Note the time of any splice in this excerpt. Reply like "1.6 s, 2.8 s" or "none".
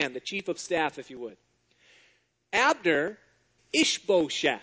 3.6 s